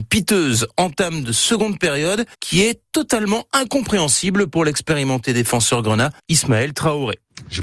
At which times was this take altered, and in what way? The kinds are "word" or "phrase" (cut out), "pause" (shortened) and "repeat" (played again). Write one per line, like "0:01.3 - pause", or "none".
0:02.3 - pause
0:06.2 - pause

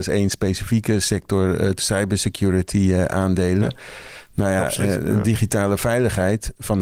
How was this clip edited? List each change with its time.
0:01.8 - word
0:04.9 - word

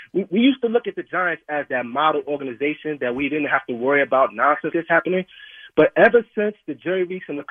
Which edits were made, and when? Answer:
0:04.7 - word

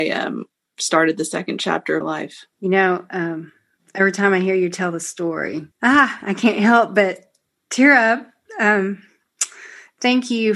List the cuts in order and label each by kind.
0:02.0 - word
0:02.5 - pause
0:03.8 - pause
0:05.7 - pause

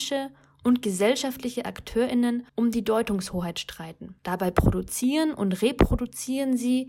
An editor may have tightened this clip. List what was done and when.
0:02.5 - pause
0:04.2 - pause

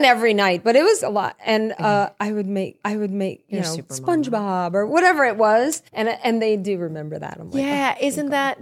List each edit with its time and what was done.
0:01.0 - word
0:02.8 - repeat
0:05.9 - pause

